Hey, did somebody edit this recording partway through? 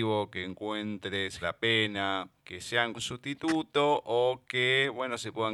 yes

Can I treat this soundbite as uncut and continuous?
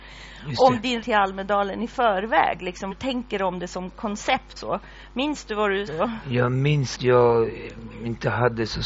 no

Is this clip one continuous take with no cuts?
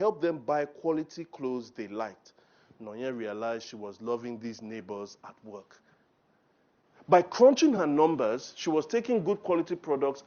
yes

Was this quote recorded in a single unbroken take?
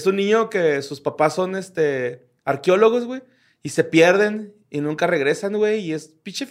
yes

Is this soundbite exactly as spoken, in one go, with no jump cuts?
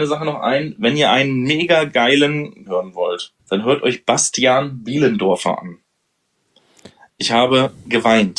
no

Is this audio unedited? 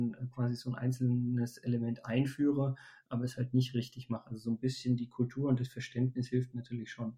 yes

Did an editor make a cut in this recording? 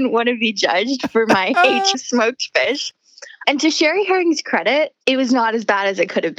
yes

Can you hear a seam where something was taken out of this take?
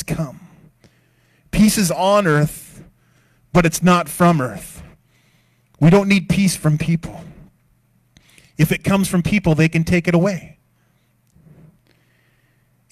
no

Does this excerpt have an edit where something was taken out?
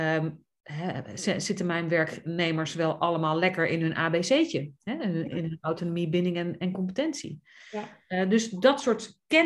no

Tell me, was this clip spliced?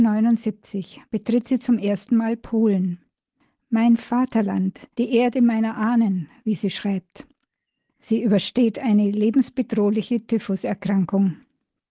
yes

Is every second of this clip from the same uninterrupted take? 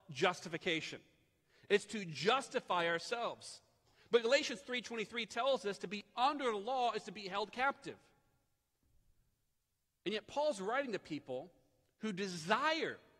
yes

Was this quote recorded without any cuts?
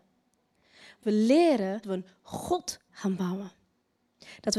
no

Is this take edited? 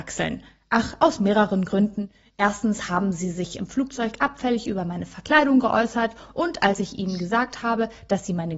no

